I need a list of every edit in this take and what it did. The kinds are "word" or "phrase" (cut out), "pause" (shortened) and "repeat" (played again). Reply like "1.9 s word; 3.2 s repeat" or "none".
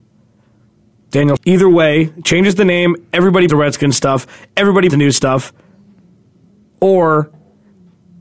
1.4 s word; 3.5 s word; 4.9 s word